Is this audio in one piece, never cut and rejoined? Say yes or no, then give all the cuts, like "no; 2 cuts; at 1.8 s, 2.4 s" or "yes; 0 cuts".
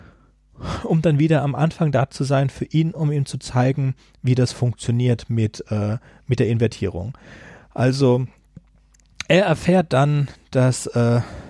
yes; 0 cuts